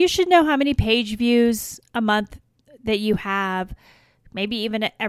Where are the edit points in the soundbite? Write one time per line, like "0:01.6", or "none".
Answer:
none